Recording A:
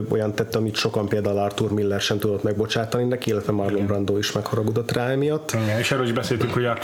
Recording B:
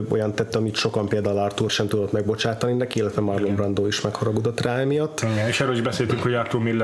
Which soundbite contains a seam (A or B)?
B